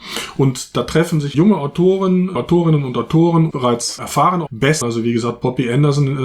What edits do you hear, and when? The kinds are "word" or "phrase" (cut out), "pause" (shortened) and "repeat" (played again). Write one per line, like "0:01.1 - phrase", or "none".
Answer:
0:01.3 - word
0:02.4 - word
0:03.5 - word
0:04.5 - word
0:04.8 - word